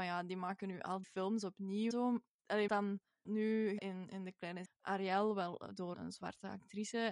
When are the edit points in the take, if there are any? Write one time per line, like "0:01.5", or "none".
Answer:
0:01.0
0:01.9
0:02.7
0:03.3
0:03.8
0:04.7
0:05.9